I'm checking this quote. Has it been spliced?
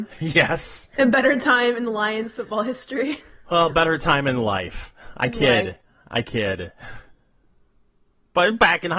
no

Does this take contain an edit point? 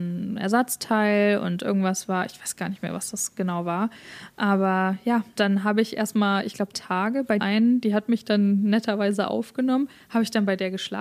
yes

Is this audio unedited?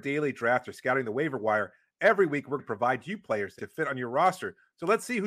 no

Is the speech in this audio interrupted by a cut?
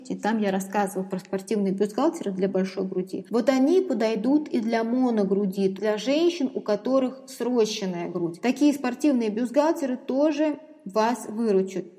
yes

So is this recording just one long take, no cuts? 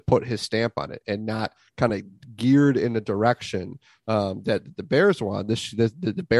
yes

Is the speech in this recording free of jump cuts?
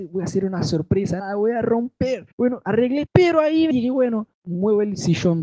no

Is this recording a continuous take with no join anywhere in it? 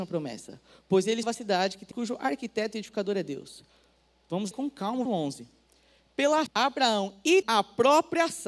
no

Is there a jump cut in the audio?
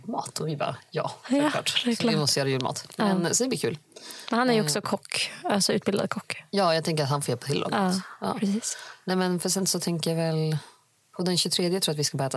no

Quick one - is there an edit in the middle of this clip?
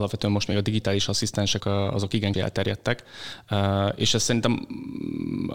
yes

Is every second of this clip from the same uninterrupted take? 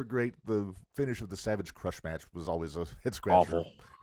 yes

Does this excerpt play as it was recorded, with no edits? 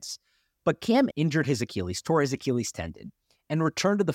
no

